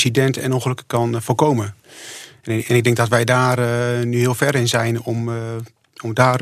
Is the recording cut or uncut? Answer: uncut